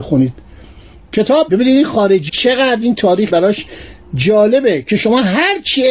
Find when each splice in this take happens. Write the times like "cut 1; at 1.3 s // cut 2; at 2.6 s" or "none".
cut 1; at 1.5 s // cut 2; at 2.3 s // cut 3; at 3.3 s